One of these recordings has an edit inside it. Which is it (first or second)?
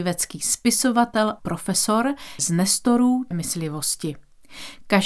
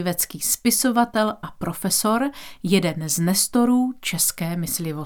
first